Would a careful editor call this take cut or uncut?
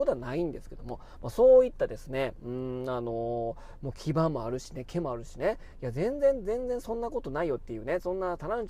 uncut